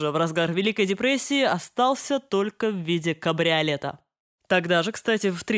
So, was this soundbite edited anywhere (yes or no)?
no